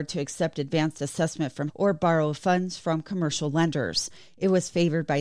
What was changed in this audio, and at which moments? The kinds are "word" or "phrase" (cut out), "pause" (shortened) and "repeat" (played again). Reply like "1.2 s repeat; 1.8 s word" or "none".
1.7 s word